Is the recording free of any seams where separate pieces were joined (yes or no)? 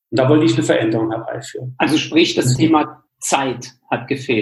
yes